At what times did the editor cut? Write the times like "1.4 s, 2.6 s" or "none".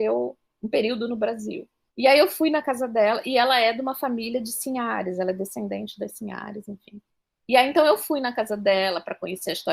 1.9 s, 7.1 s